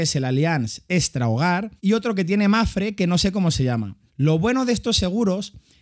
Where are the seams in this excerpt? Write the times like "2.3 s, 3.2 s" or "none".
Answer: 1.8 s, 4.1 s